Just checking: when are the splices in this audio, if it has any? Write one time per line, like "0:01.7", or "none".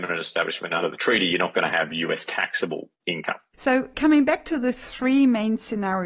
none